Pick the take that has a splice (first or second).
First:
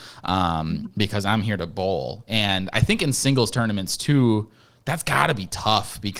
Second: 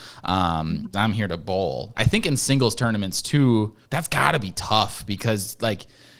second